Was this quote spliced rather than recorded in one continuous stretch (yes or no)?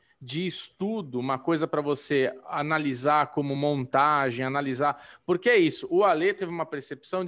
no